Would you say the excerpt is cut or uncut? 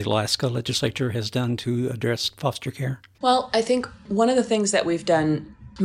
cut